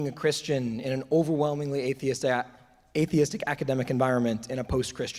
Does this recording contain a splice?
no; 0 cuts

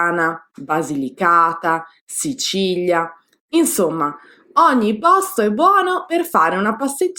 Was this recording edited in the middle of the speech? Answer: no; 0 cuts

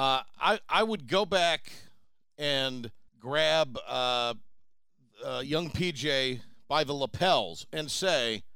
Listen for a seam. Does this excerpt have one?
yes; 1 cut; at 3.1 s

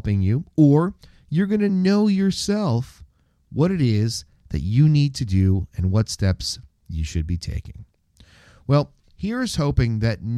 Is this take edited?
no; 0 cuts

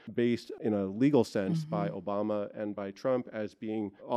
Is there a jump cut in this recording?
no; 0 cuts

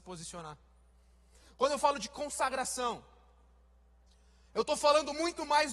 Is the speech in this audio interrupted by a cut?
no; 0 cuts

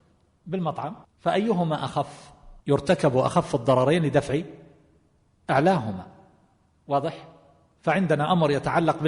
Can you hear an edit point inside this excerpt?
yes; 2 cuts; at 1.0 s, 2.6 s

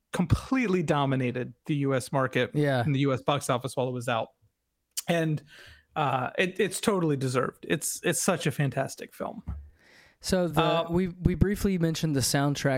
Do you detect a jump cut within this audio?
no; 0 cuts

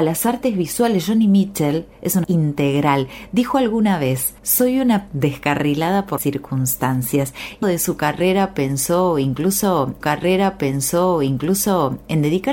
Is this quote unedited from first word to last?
no; 7 cuts; at 1.9 s, 2.2 s, 4.4 s, 5.1 s, 6.2 s, 7.6 s, 10.0 s

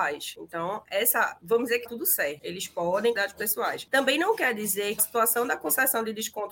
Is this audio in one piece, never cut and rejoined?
no; 3 cuts; at 1.9 s, 3.2 s, 5.0 s

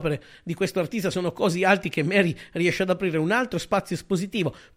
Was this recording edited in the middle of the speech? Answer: no; 0 cuts

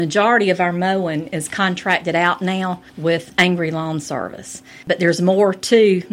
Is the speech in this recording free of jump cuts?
yes; 0 cuts

